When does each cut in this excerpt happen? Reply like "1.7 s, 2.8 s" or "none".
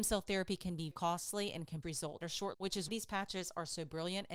0.9 s, 1.8 s, 2.2 s, 2.5 s, 2.9 s